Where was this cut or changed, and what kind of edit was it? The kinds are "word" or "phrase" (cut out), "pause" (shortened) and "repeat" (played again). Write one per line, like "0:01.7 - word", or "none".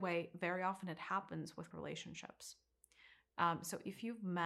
0:01.7 - word